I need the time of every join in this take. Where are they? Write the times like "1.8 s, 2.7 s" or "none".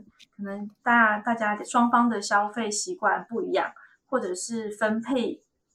none